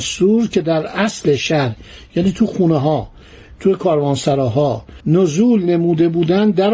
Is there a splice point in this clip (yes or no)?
yes